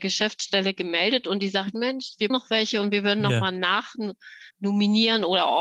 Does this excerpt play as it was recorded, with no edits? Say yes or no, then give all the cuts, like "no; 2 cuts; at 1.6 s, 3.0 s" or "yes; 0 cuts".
no; 2 cuts; at 2.3 s, 4.5 s